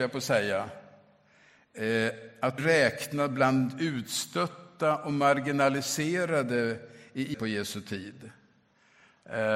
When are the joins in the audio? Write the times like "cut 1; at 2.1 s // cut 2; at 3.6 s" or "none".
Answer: cut 1; at 2.6 s // cut 2; at 7.3 s